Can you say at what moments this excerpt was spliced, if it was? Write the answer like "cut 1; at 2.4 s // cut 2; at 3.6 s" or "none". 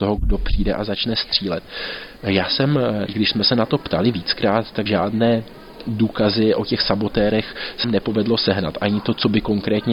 cut 1; at 3.1 s // cut 2; at 4.9 s // cut 3; at 7.8 s

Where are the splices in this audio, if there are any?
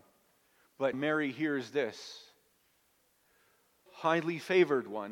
cut 1; at 0.9 s // cut 2; at 3.9 s

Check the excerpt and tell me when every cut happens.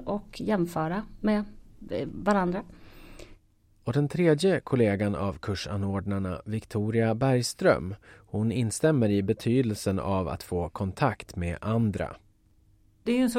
none

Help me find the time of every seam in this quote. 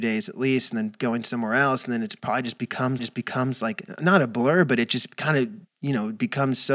cut 1; at 3.0 s

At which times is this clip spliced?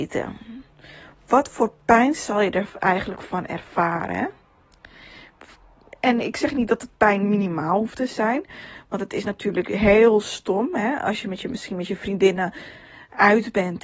none

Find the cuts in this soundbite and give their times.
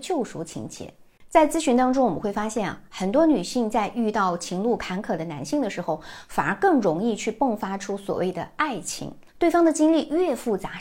cut 1; at 9.3 s

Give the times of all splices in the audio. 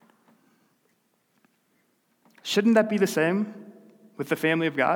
none

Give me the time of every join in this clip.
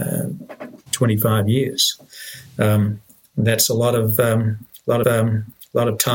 cut 1; at 2.5 s // cut 2; at 5.0 s

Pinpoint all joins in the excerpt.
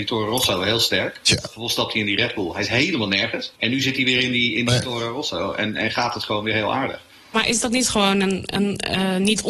cut 1; at 3.6 s

